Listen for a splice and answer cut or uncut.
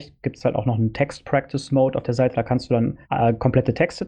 cut